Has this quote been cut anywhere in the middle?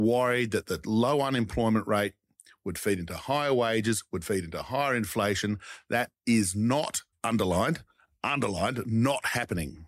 yes; 1 cut; at 7.1 s

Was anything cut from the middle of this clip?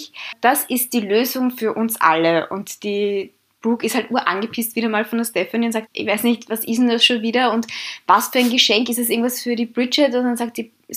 yes; 1 cut; at 5.9 s

